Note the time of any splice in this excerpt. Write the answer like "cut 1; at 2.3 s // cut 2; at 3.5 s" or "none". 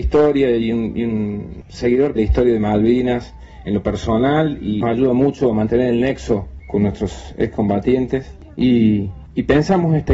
cut 1; at 2.2 s // cut 2; at 4.8 s // cut 3; at 6.6 s

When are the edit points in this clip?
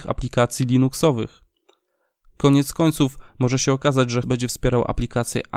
cut 1; at 3.3 s // cut 2; at 4.2 s

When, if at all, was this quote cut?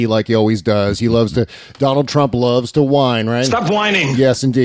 none

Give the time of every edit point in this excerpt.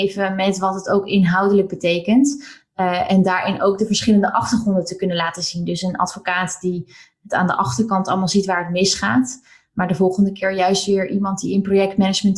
none

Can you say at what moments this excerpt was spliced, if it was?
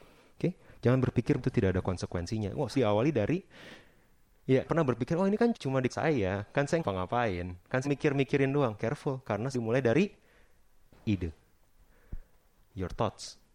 cut 1; at 1.4 s // cut 2; at 2.7 s // cut 3; at 4.7 s // cut 4; at 5.5 s // cut 5; at 5.9 s // cut 6; at 6.8 s // cut 7; at 7.8 s // cut 8; at 9.5 s

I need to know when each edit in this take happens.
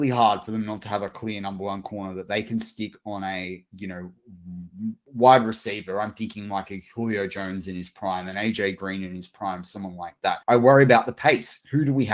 cut 1; at 10.4 s

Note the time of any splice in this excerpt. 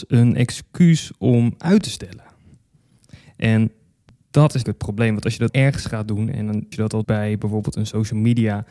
cut 1; at 4.6 s // cut 2; at 5.5 s // cut 3; at 6.7 s // cut 4; at 7.0 s

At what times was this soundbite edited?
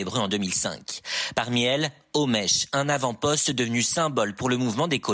none

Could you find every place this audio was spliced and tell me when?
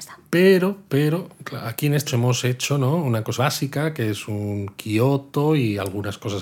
cut 1; at 2.1 s // cut 2; at 3.4 s

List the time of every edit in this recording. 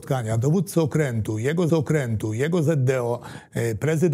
cut 1; at 1.7 s

